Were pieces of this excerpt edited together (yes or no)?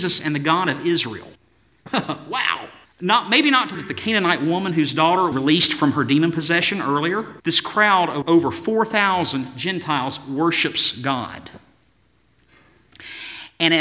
yes